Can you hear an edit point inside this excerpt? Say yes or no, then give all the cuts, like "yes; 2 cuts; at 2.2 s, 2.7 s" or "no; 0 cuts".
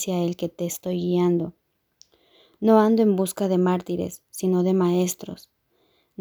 no; 0 cuts